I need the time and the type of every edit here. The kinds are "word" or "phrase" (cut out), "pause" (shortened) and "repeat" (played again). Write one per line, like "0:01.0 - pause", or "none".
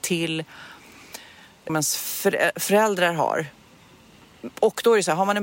0:01.7 - phrase